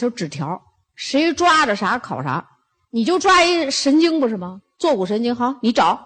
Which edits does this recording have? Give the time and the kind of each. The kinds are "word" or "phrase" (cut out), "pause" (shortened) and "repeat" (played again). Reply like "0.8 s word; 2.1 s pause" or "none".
none